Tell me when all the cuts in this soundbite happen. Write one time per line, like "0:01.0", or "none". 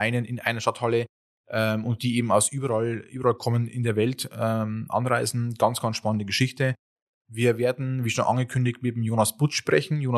none